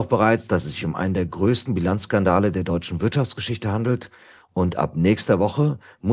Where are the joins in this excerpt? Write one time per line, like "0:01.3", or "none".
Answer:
none